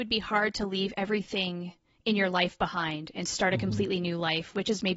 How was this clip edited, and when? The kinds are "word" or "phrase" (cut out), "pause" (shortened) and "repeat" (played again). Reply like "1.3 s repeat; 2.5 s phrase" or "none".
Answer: none